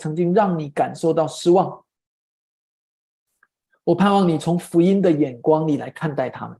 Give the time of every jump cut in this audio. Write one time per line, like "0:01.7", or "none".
none